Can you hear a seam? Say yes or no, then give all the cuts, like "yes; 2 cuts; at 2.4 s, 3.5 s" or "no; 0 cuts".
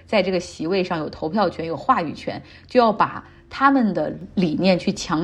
no; 0 cuts